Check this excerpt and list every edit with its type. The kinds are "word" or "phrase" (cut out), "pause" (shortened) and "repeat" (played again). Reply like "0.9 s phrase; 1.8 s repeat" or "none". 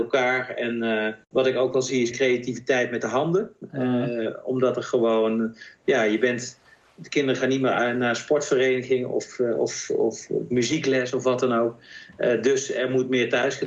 1.2 s pause; 2.1 s word

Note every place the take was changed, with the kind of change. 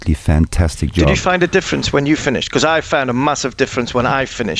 none

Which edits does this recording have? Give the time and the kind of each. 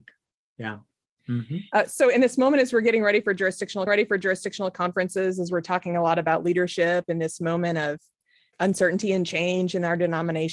3.9 s repeat; 8.5 s word

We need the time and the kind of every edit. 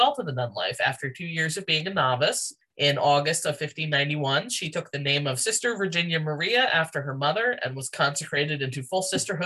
none

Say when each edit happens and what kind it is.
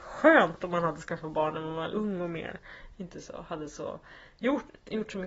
1.9 s word

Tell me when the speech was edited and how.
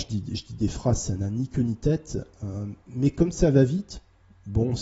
2.8 s pause

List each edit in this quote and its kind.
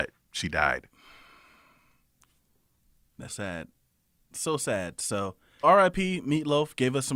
3.3 s word; 5.6 s word

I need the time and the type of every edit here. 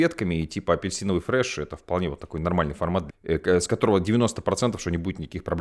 3.1 s word

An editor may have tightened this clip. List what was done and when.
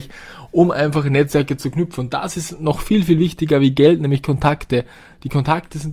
none

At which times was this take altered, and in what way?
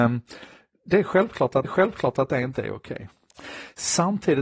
1.6 s repeat

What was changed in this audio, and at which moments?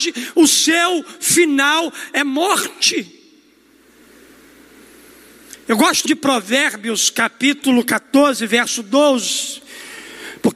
6.1 s word

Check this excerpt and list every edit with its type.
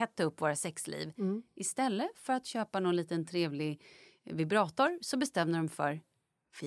none

